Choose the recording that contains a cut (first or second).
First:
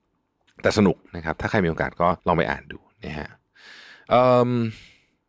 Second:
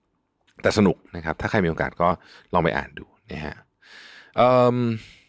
first